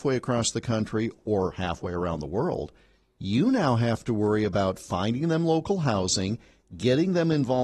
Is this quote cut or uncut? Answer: uncut